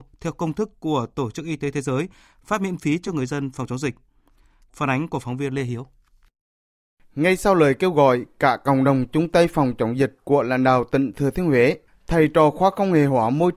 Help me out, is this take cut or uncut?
uncut